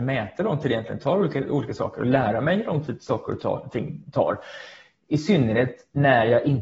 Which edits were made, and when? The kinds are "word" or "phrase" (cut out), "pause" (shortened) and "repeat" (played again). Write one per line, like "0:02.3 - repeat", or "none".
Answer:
none